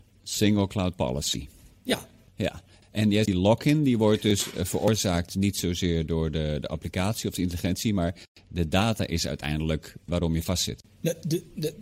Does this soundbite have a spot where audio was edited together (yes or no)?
yes